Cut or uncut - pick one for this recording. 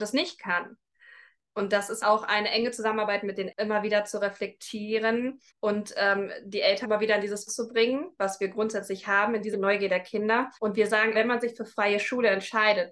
cut